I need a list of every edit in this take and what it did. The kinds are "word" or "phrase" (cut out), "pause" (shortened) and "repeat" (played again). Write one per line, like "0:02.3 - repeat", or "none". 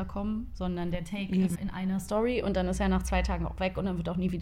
0:01.6 - word